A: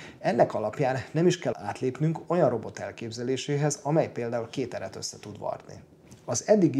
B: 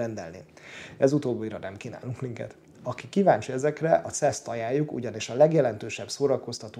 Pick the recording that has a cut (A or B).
A